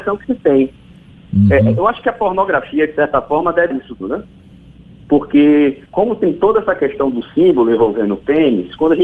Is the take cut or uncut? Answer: cut